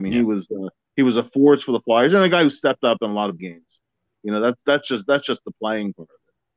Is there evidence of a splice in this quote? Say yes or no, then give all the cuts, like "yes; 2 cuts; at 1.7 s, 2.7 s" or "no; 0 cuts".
yes; 1 cut; at 3.4 s